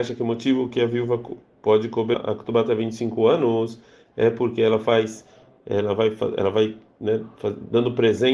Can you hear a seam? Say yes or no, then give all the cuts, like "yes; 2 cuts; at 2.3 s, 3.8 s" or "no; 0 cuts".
yes; 1 cut; at 2.1 s